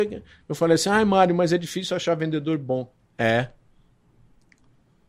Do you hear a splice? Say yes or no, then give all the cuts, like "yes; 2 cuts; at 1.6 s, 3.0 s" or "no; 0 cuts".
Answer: no; 0 cuts